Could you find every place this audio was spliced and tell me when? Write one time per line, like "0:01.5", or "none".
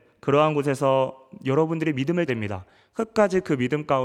0:02.3